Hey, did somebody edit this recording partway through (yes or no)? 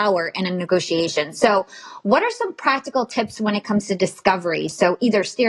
no